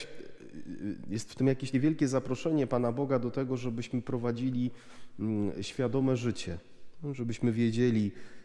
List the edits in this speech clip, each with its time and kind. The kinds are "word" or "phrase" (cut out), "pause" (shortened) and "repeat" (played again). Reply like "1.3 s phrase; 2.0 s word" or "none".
1.7 s word